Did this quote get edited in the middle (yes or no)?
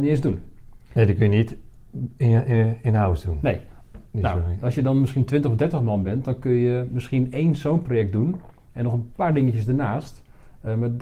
no